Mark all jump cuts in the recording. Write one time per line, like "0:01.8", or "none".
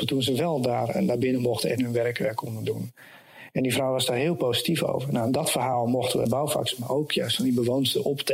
0:06.3